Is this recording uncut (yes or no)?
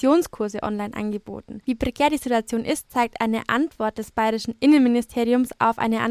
yes